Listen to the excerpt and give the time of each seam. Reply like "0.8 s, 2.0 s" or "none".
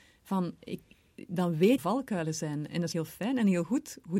1.8 s, 2.9 s